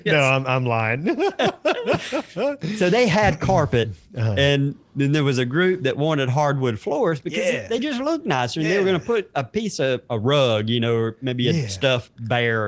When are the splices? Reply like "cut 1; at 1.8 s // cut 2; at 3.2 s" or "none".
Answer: none